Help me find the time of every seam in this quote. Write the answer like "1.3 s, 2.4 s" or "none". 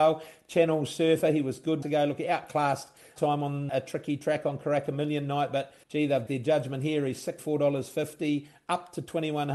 1.8 s, 3.2 s, 3.7 s, 5.8 s, 6.3 s, 7.4 s